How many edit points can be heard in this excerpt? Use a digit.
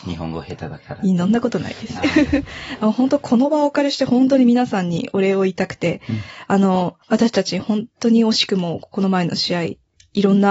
1